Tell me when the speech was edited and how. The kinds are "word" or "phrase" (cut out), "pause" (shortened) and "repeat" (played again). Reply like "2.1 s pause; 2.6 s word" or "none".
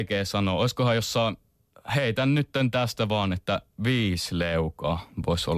none